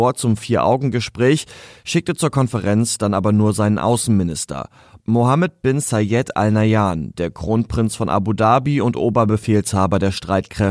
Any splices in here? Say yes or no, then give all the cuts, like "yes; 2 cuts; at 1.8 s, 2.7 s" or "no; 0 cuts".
no; 0 cuts